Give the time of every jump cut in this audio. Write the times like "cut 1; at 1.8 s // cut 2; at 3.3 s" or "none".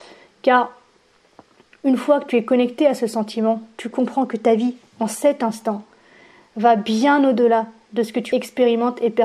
none